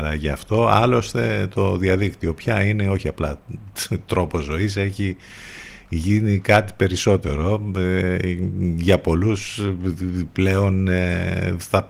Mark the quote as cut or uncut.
uncut